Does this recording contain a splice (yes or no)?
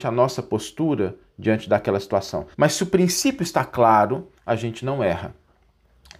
yes